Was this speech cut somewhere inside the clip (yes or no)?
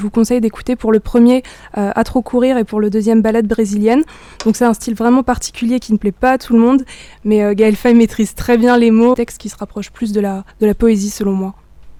yes